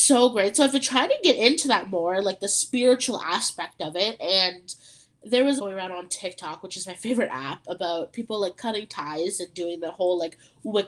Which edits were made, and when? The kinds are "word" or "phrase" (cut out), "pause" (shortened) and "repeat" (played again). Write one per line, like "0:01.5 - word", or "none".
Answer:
0:05.6 - phrase